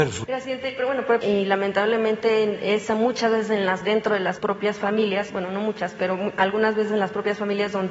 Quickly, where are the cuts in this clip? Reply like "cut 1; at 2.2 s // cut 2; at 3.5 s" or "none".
cut 1; at 1.2 s